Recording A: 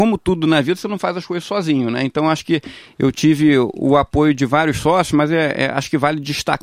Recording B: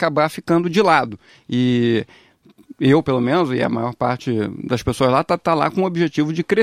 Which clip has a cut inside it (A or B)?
B